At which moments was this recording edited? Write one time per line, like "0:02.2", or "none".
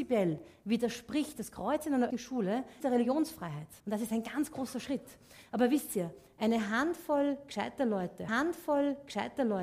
0:02.1
0:02.8
0:03.8
0:08.3